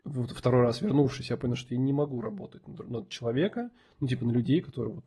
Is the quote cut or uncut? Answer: uncut